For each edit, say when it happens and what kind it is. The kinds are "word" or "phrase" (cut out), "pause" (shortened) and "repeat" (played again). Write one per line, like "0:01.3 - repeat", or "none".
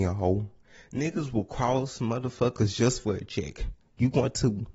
none